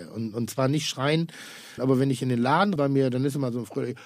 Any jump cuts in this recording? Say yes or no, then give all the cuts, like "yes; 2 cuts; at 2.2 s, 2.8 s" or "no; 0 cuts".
yes; 2 cuts; at 1.8 s, 2.8 s